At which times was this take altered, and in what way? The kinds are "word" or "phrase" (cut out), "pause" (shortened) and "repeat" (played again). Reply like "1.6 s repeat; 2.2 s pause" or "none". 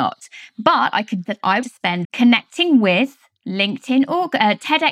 1.3 s word; 1.6 s phrase; 2.0 s phrase